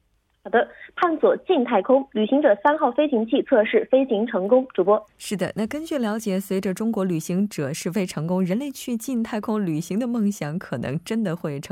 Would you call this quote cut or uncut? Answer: cut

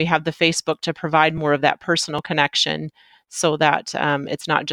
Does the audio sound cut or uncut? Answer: uncut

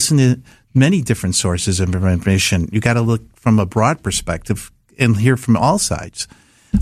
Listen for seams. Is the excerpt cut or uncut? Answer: uncut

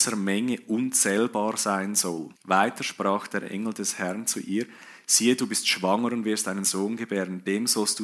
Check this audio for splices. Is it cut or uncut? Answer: cut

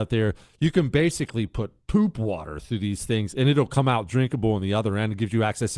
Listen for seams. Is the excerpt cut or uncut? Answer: uncut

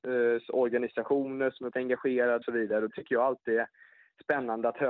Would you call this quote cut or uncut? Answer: cut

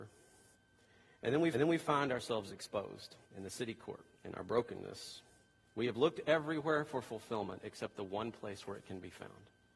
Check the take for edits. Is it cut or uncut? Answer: cut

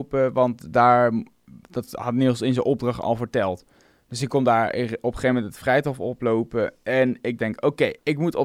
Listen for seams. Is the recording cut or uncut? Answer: uncut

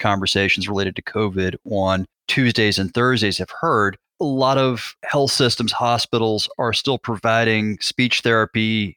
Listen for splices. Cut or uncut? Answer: cut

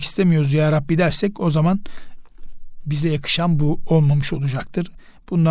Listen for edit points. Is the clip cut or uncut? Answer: uncut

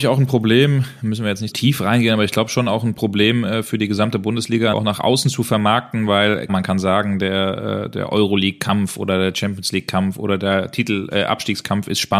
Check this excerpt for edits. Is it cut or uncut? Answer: cut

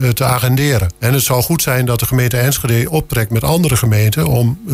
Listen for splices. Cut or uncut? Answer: cut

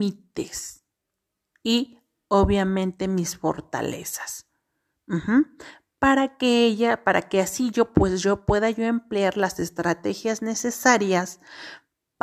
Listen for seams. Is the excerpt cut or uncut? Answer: uncut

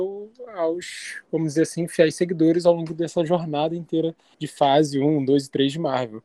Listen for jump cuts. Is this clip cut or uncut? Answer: uncut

